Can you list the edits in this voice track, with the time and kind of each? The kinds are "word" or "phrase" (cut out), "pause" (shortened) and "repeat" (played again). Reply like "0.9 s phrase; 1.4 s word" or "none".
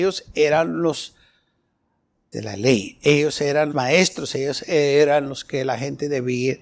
2.3 s word; 3.7 s word